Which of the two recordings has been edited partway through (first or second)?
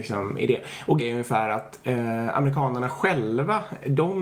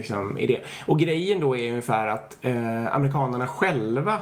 first